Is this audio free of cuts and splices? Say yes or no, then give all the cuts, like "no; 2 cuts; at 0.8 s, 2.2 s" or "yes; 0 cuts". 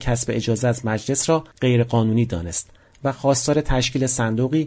no; 1 cut; at 1.5 s